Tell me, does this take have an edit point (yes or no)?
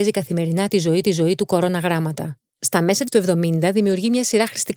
yes